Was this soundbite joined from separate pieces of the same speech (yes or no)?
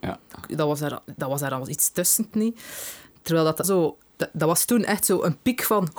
yes